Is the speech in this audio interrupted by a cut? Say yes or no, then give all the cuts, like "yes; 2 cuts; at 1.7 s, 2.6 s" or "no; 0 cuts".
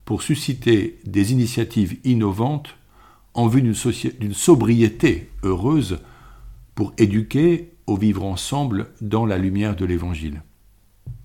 no; 0 cuts